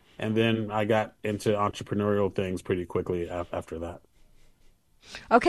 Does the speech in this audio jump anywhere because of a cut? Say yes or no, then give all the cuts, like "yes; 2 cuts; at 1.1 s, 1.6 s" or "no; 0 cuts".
no; 0 cuts